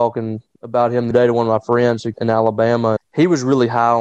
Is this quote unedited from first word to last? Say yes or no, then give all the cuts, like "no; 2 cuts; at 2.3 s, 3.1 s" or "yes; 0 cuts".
no; 3 cuts; at 1.1 s, 2.1 s, 3.0 s